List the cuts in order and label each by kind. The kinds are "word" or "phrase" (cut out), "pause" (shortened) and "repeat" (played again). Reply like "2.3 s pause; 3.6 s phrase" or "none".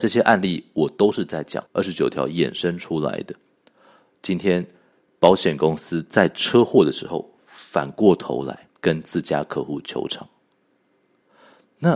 1.7 s pause; 8.7 s pause